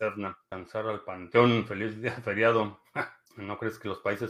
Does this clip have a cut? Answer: no; 0 cuts

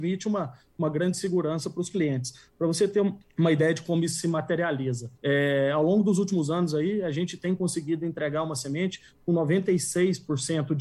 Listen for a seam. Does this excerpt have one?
yes; 2 cuts; at 3.2 s, 5.2 s

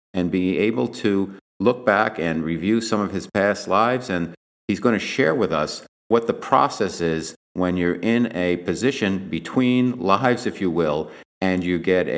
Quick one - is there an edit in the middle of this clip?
no; 0 cuts

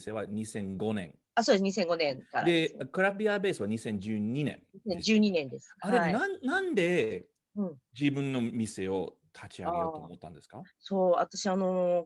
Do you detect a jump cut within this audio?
yes; 2 cuts; at 1.3 s, 10.7 s

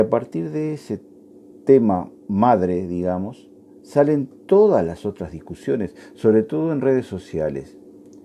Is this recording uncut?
yes; 0 cuts

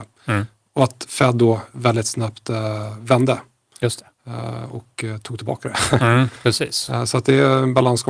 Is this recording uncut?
yes; 0 cuts

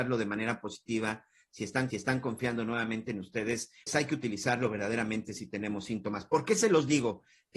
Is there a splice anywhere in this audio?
yes; 2 cuts; at 1.9 s, 3.9 s

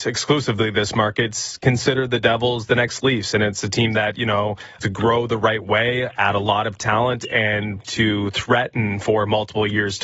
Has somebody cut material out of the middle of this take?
yes; 2 cuts; at 4.8 s, 7.8 s

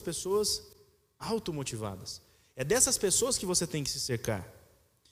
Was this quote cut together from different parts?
no; 0 cuts

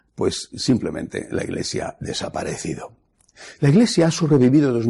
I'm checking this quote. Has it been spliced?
yes; 1 cut; at 2.0 s

